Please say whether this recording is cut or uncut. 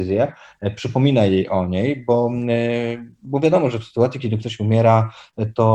uncut